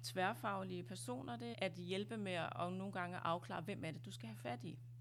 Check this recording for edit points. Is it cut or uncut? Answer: cut